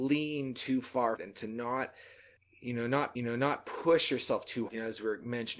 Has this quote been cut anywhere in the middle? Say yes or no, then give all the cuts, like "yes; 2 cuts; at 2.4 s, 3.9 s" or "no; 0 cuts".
yes; 4 cuts; at 1.2 s, 2.4 s, 3.2 s, 4.7 s